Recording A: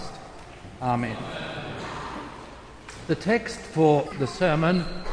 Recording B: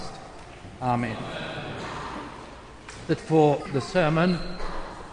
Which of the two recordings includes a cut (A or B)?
B